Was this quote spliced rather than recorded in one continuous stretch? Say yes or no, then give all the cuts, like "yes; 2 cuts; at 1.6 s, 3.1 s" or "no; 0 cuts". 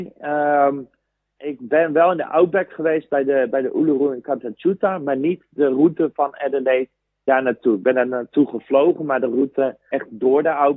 no; 0 cuts